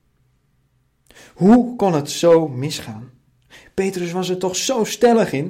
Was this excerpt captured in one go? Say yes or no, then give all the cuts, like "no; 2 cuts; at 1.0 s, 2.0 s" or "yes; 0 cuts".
yes; 0 cuts